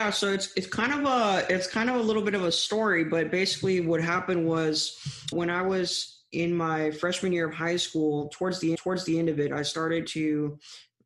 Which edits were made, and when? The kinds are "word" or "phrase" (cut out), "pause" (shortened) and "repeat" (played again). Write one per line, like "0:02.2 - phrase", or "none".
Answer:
0:05.3 - word
0:08.7 - repeat